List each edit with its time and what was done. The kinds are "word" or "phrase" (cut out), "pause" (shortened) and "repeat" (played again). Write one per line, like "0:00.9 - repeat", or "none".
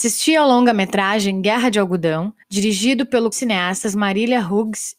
0:02.4 - pause
0:03.3 - phrase